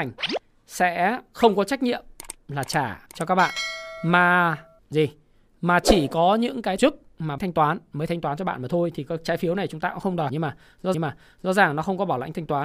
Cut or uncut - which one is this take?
cut